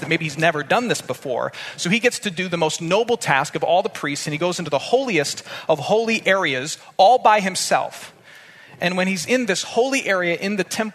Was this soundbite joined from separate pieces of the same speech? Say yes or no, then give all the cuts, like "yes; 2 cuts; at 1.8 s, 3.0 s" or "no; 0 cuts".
no; 0 cuts